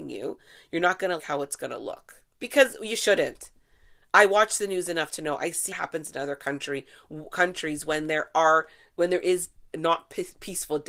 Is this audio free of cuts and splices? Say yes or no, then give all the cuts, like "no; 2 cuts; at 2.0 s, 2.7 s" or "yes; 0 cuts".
no; 4 cuts; at 1.2 s, 2.3 s, 5.7 s, 9.7 s